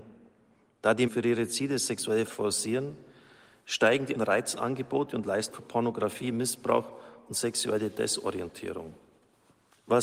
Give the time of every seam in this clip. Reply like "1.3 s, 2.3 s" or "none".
1.1 s, 2.3 s, 4.1 s, 5.5 s

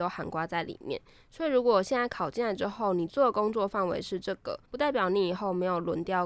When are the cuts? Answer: 4.6 s

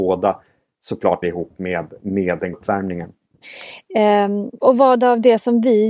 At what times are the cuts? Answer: 1.2 s, 2.5 s, 4.6 s

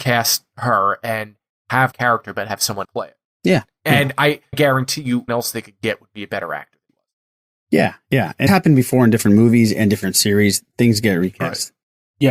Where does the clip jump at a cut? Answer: 1.9 s, 2.8 s, 4.5 s, 5.3 s, 6.9 s, 8.5 s

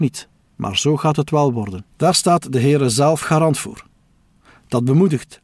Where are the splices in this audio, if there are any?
1.9 s

